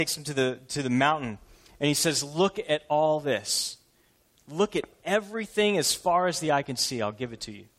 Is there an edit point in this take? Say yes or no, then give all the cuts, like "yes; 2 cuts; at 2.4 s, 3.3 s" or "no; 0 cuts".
no; 0 cuts